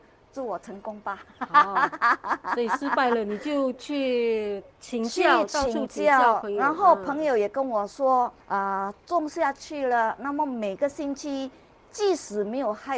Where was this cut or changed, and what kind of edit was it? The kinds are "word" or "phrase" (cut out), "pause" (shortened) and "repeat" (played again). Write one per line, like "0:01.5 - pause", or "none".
0:08.4 - pause